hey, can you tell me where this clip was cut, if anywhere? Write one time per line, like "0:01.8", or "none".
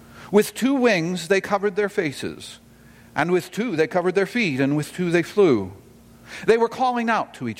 none